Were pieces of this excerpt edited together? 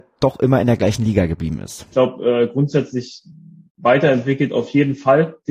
no; 0 cuts

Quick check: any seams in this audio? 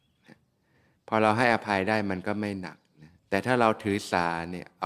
yes; 1 cut; at 3.2 s

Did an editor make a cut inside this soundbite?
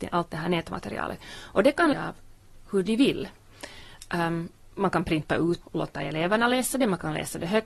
yes; 3 cuts; at 1.9 s, 4.7 s, 5.6 s

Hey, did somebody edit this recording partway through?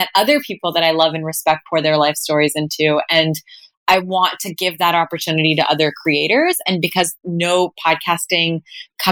no; 0 cuts

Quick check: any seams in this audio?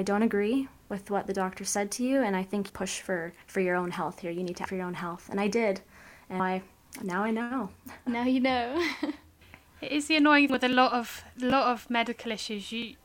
yes; 5 cuts; at 2.7 s, 3.4 s, 4.7 s, 6.4 s, 10.5 s

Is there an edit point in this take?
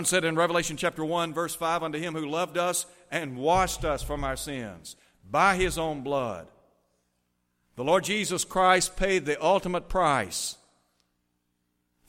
no; 0 cuts

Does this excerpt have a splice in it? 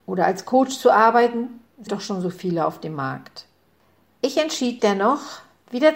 yes; 3 cuts; at 1.9 s, 3.8 s, 4.8 s

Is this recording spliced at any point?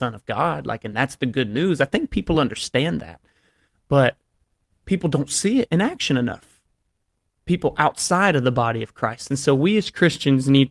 no; 0 cuts

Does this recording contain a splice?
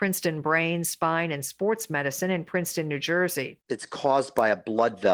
no; 0 cuts

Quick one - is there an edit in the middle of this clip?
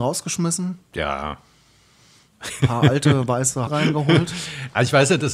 yes; 2 cuts; at 2.6 s, 3.7 s

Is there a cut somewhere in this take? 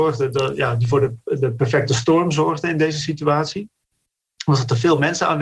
no; 0 cuts

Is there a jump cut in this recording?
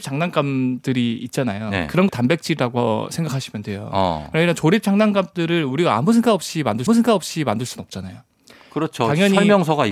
yes; 2 cuts; at 2.1 s, 6.9 s

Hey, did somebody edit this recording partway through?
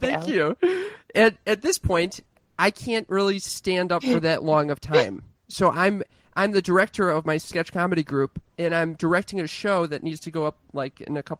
no; 0 cuts

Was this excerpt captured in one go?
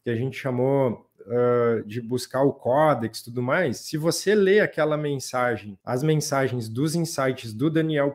no; 1 cut; at 5.8 s

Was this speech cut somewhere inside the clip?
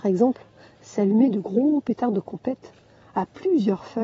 no; 0 cuts

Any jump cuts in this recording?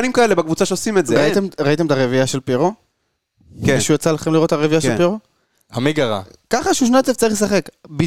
no; 0 cuts

